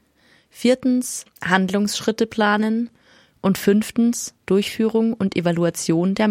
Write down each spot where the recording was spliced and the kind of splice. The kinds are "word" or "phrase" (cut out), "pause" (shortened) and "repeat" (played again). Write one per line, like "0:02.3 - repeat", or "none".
none